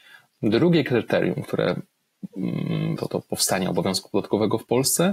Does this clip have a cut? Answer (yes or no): yes